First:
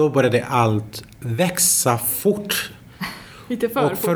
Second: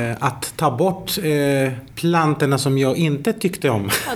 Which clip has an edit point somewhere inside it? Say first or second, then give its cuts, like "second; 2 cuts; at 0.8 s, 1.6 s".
second; 1 cut; at 1.9 s